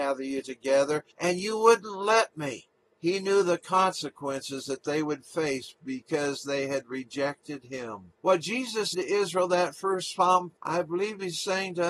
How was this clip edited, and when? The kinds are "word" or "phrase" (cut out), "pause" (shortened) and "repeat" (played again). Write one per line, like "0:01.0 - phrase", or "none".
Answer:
0:01.1 - pause
0:02.8 - pause
0:08.2 - pause
0:08.9 - word
0:10.6 - phrase